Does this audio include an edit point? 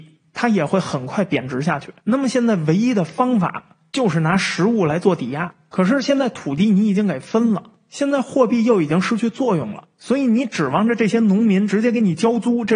yes; 1 cut; at 2.0 s

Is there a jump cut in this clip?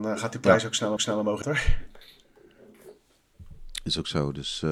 yes; 2 cuts; at 1.0 s, 1.4 s

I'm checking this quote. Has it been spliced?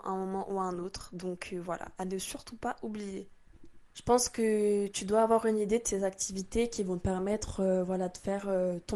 yes; 1 cut; at 3.8 s

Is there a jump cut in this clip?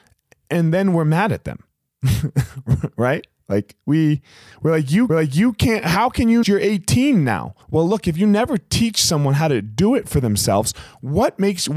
yes; 4 cuts; at 1.7 s, 5.1 s, 6.4 s, 7.6 s

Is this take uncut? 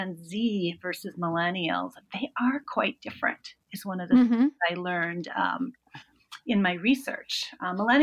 yes; 0 cuts

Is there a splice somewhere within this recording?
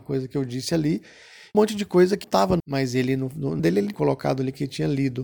yes; 5 cuts; at 1.5 s, 2.2 s, 2.6 s, 3.6 s, 3.9 s

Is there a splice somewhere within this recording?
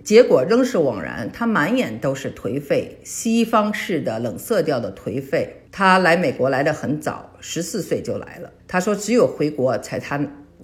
yes; 2 cuts; at 5.7 s, 8.6 s

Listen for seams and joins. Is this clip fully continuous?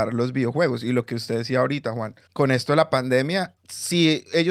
no; 2 cuts; at 2.3 s, 3.6 s

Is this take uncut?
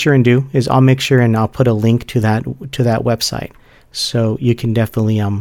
yes; 0 cuts

